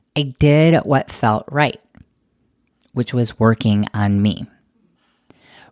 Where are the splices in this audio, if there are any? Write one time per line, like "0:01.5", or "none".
none

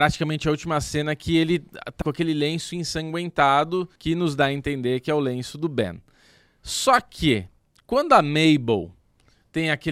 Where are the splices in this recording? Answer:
0:02.0
0:04.0

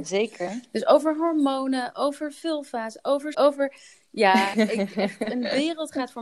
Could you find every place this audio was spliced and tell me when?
0:03.3
0:04.5

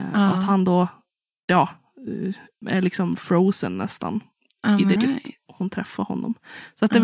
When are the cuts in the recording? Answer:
0:02.6
0:05.0

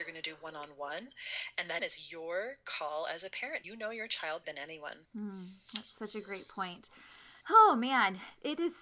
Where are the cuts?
0:01.8
0:03.6
0:04.4
0:05.0
0:07.4

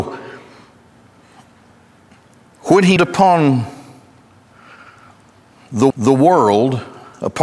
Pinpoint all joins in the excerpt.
0:03.0
0:05.9

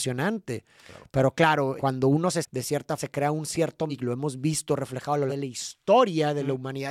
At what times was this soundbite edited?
0:01.8
0:02.4
0:03.0
0:03.9
0:05.3

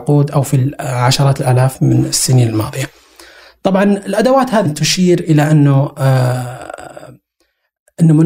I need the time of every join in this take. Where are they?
0:04.6

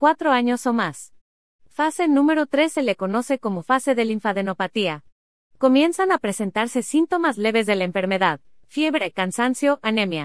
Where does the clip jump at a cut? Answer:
none

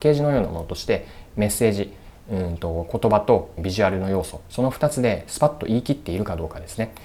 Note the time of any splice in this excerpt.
0:03.6

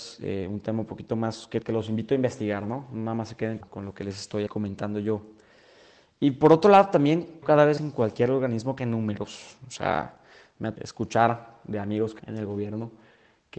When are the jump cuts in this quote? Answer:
0:01.6
0:03.6
0:04.5
0:07.4
0:07.8
0:08.8
0:10.8
0:12.2

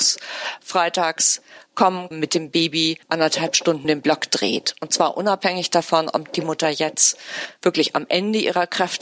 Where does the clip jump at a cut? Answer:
0:02.1
0:03.0
0:03.8

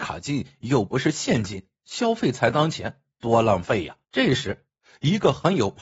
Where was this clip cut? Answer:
0:04.0

